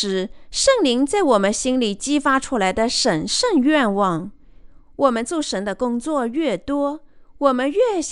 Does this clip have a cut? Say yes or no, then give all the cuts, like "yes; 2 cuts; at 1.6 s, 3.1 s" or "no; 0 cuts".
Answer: no; 0 cuts